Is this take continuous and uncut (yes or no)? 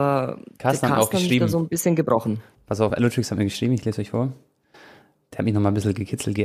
yes